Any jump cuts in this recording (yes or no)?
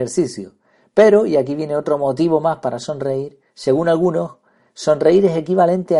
yes